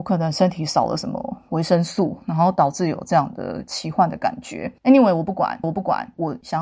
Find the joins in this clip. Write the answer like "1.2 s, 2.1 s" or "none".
5.6 s